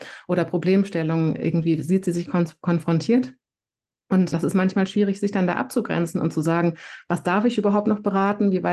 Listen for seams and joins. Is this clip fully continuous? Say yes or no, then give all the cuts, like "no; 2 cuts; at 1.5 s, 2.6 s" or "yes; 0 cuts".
no; 1 cut; at 4.3 s